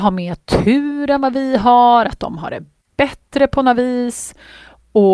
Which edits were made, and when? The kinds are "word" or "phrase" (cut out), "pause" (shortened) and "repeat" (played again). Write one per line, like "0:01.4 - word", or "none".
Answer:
none